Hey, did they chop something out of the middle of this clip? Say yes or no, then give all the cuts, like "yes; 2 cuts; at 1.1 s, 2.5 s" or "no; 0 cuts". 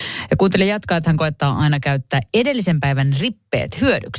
no; 0 cuts